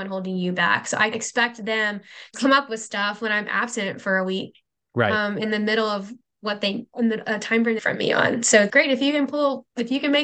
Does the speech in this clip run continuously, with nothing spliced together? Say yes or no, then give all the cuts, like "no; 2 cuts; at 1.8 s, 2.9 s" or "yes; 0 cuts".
no; 5 cuts; at 1.1 s, 2.3 s, 6.9 s, 7.8 s, 8.7 s